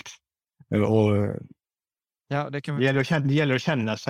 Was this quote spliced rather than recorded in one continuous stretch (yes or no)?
no